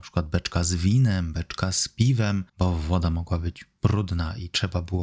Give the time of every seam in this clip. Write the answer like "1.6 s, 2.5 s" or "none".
2.5 s